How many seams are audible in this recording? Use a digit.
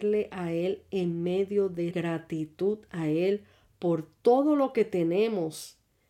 1